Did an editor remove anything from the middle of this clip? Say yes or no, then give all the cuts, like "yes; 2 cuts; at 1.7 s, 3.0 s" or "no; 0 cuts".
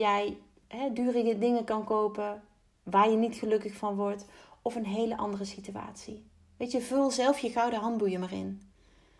no; 0 cuts